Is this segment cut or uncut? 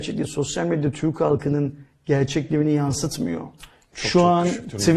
uncut